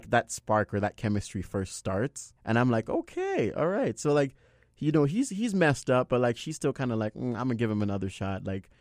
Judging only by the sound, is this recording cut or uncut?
cut